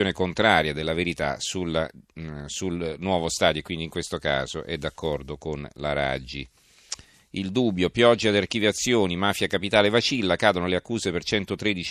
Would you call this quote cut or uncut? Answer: uncut